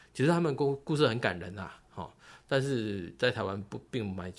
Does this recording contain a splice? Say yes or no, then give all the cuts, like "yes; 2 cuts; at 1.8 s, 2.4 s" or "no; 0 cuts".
no; 0 cuts